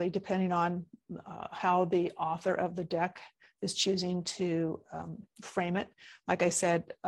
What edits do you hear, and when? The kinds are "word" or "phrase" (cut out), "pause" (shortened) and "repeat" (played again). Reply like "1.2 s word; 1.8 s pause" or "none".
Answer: none